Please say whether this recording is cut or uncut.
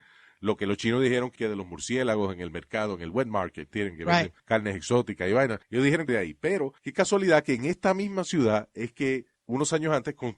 cut